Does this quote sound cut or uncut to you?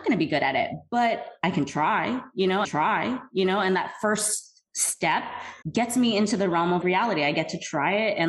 cut